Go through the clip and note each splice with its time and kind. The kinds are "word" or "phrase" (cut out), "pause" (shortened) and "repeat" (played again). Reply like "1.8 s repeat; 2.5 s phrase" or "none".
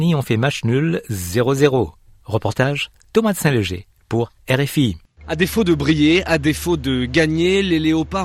none